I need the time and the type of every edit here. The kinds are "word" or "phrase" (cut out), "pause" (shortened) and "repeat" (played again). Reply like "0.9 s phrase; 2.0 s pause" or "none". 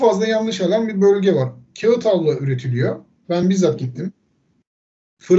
none